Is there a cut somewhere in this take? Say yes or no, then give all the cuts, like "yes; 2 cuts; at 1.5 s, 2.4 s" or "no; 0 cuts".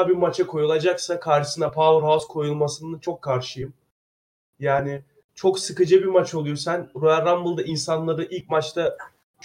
no; 0 cuts